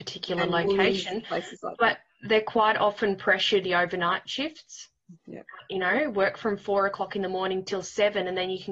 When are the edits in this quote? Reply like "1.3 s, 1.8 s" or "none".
3.6 s, 5.2 s